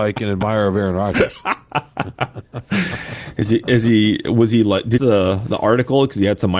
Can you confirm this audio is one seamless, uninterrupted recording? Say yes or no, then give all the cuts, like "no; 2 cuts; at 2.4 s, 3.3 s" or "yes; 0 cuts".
no; 1 cut; at 5.0 s